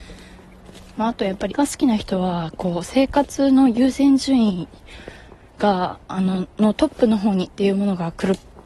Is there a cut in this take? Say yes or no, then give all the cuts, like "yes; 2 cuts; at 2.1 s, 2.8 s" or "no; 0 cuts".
yes; 2 cuts; at 1.5 s, 7.5 s